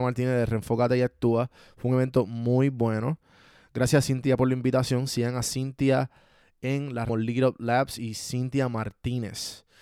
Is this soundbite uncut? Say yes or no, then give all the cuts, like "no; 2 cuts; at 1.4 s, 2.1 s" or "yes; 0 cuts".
no; 1 cut; at 7.1 s